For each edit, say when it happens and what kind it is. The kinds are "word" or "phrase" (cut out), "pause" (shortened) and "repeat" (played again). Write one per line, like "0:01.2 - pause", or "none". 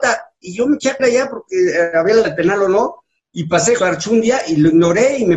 0:01.0 - word
0:02.2 - word
0:03.8 - word

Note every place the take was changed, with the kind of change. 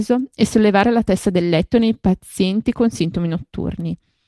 none

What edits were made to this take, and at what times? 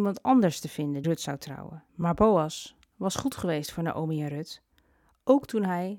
0:01.0 - word
0:01.9 - pause

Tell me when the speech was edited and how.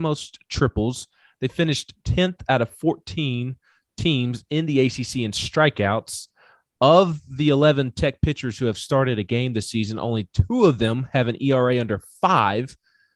none

